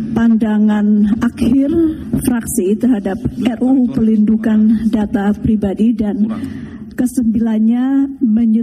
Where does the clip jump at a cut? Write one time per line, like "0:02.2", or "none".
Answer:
none